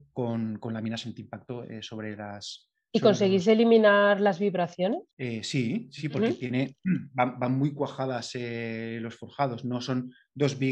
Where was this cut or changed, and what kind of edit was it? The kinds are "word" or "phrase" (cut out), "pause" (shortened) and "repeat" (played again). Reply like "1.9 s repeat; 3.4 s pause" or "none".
5.1 s pause; 6.0 s word

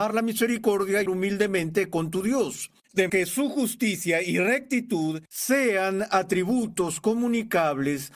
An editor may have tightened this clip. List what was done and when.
1.1 s word; 3.1 s word; 5.3 s pause

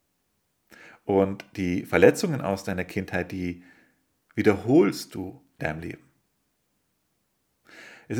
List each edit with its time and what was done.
5.6 s phrase

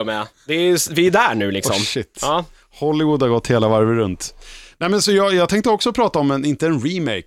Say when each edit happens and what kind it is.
none

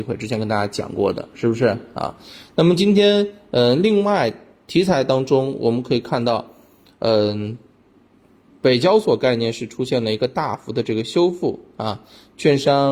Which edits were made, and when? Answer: none

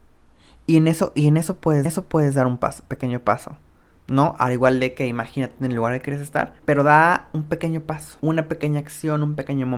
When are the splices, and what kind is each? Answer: 1.9 s repeat; 6.6 s pause; 8.2 s pause

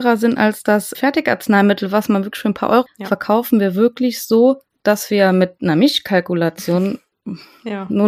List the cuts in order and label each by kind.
0.9 s word; 2.9 s word; 4.8 s pause

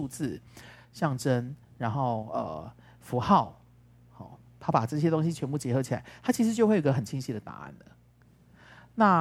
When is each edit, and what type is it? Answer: none

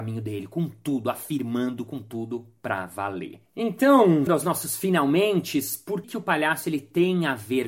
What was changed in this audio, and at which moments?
4.3 s word; 6.0 s word

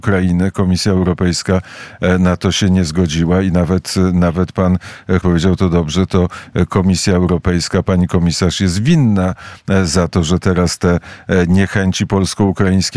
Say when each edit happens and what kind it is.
5.2 s word

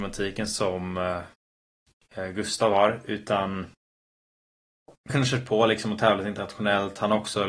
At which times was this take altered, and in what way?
5.1 s phrase

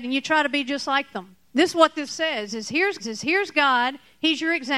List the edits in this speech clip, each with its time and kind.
1.4 s pause; 2.1 s word; 3.0 s repeat

